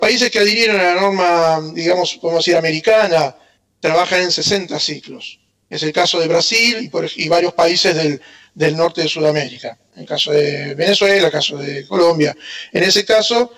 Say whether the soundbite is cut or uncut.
uncut